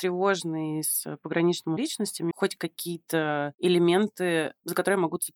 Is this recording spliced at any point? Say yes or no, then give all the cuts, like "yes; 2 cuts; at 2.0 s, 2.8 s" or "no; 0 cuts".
yes; 2 cuts; at 1.8 s, 2.3 s